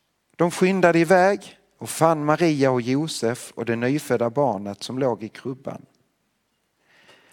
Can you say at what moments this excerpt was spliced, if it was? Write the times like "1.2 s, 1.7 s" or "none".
none